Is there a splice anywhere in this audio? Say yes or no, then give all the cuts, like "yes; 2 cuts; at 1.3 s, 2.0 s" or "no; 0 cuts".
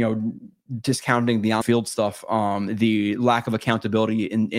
yes; 1 cut; at 1.6 s